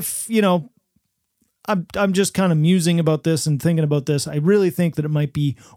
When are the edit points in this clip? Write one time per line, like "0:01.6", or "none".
none